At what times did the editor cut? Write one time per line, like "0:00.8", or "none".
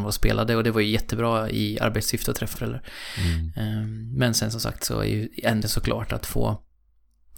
0:02.5
0:05.6